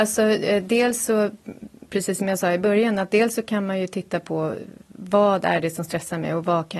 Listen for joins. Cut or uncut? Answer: uncut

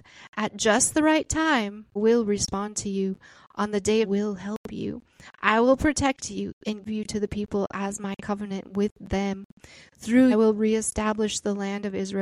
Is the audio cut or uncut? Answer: cut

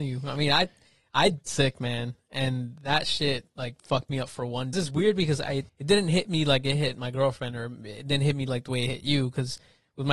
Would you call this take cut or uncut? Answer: cut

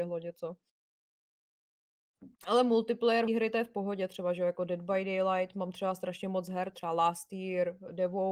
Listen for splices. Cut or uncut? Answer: cut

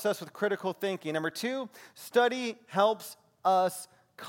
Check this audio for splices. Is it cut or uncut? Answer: uncut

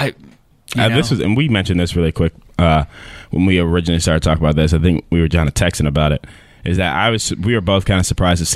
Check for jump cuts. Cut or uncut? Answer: uncut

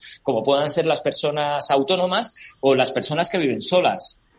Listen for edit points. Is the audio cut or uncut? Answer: uncut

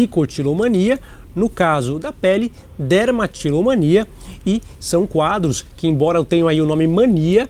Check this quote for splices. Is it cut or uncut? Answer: uncut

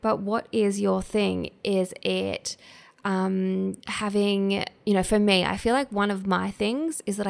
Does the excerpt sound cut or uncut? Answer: cut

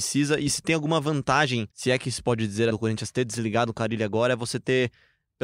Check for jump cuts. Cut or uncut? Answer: cut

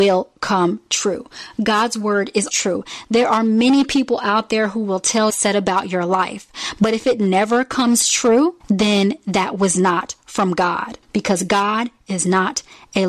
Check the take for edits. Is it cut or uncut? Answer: cut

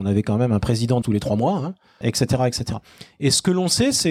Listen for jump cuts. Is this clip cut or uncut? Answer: cut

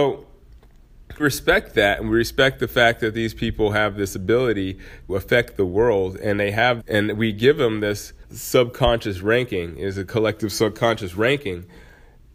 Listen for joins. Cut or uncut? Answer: cut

